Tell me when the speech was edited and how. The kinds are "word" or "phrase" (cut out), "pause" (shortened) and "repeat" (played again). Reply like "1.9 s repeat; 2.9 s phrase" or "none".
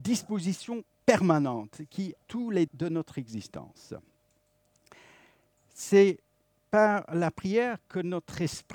2.2 s word; 2.7 s word